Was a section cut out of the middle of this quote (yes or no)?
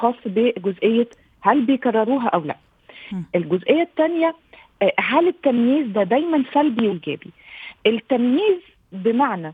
yes